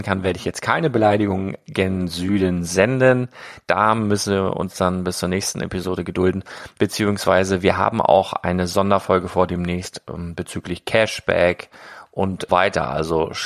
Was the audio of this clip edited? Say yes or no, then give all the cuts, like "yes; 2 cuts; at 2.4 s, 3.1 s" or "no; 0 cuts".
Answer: yes; 1 cut; at 12.5 s